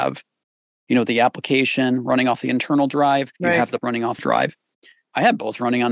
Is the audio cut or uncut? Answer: cut